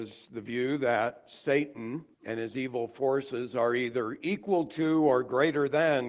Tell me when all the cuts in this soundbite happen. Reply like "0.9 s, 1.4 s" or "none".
2.1 s